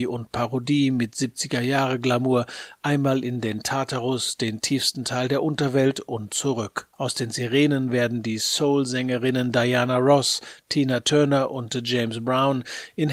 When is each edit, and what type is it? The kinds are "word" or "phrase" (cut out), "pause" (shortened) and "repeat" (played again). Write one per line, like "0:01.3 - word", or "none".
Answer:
0:06.9 - pause